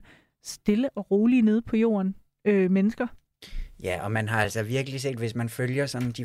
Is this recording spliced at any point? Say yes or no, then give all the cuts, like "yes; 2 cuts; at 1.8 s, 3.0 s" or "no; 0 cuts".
no; 0 cuts